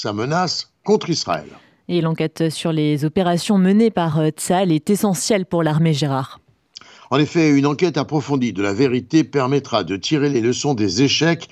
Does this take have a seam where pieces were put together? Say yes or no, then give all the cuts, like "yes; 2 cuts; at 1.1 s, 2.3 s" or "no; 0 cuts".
no; 0 cuts